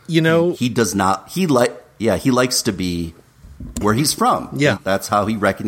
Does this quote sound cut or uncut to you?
uncut